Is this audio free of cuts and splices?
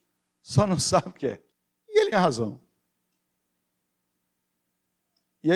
no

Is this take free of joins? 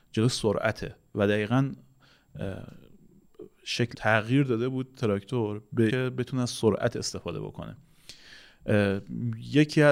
no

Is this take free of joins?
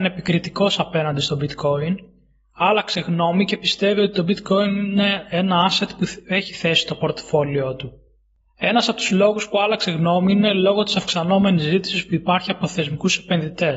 yes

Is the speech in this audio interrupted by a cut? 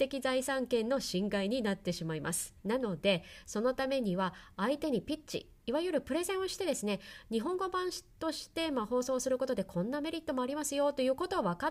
yes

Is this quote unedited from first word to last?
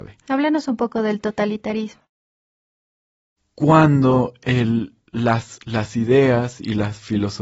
yes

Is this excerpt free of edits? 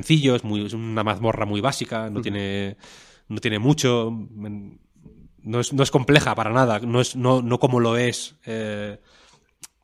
yes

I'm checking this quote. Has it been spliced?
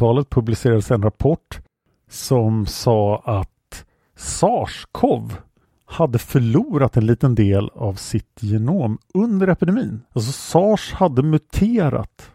yes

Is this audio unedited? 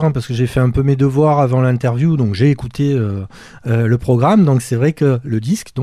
yes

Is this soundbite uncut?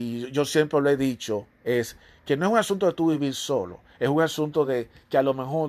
yes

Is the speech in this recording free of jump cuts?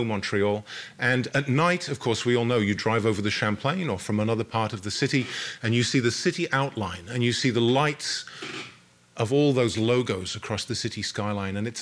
yes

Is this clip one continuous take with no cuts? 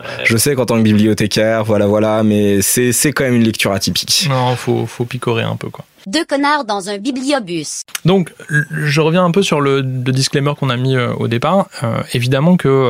yes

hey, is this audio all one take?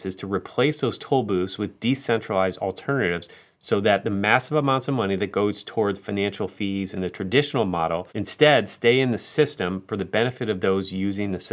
no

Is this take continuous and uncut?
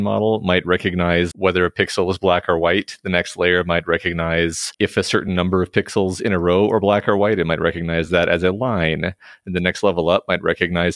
yes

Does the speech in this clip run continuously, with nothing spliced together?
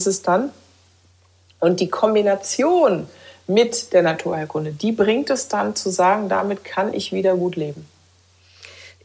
yes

